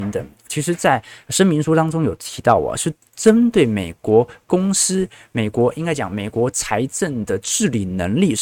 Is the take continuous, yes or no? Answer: yes